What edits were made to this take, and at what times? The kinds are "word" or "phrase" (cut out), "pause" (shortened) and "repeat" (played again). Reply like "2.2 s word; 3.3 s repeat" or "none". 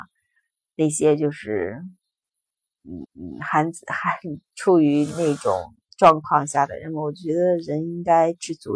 3.0 s repeat